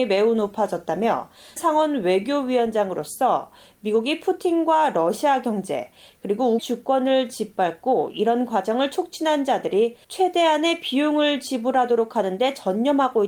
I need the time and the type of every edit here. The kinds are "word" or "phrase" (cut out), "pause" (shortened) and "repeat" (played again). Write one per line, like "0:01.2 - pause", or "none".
0:01.6 - word
0:06.6 - word
0:10.0 - pause